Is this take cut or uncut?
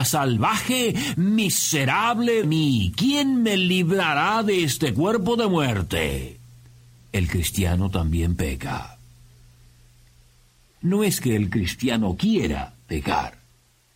cut